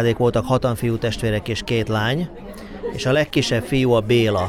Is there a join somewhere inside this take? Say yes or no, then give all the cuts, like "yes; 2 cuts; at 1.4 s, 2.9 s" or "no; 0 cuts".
no; 0 cuts